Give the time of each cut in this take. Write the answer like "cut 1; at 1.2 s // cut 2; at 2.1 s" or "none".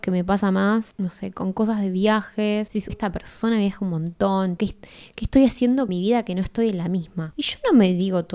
cut 1; at 2.9 s // cut 2; at 4.6 s // cut 3; at 5.9 s